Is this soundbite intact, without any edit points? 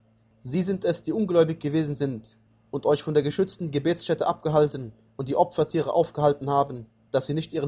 yes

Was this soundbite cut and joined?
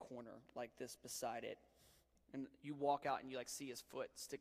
no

